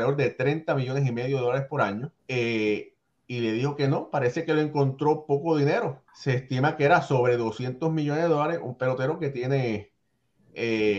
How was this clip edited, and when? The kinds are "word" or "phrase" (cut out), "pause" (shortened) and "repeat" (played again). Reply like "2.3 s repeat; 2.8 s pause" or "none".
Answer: 2.2 s pause; 6.1 s pause